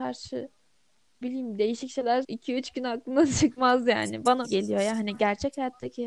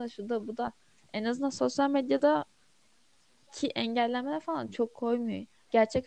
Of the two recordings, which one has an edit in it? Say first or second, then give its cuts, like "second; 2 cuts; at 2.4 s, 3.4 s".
first; 3 cuts; at 1.2 s, 2.2 s, 4.4 s